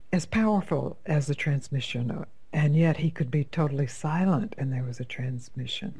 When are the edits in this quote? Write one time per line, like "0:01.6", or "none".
none